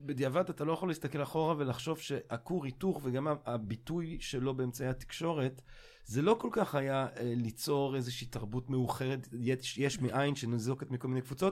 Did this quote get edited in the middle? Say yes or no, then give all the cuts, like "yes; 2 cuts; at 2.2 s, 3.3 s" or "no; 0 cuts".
no; 0 cuts